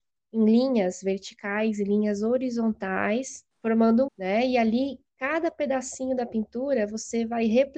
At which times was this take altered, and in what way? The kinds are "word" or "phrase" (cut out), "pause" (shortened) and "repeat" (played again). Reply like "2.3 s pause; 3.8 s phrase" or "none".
3.5 s pause; 4.1 s word